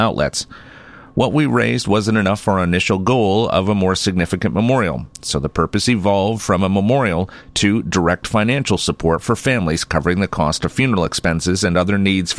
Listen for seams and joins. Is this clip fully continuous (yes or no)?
yes